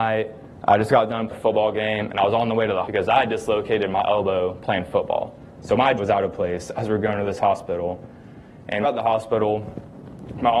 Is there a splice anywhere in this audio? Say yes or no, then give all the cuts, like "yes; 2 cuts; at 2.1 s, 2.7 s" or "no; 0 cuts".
yes; 4 cuts; at 1.3 s, 2.8 s, 6.0 s, 8.8 s